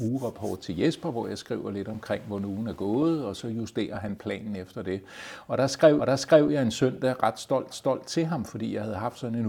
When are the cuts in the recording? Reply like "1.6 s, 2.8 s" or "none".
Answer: 6.0 s, 7.7 s